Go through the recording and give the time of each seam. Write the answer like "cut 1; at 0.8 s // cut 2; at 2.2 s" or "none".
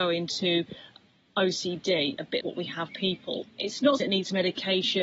cut 1; at 2.4 s // cut 2; at 2.9 s // cut 3; at 3.4 s // cut 4; at 4.0 s